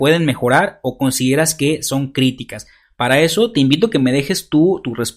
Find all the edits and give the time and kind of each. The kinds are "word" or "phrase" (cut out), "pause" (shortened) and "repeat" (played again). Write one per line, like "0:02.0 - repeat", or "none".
none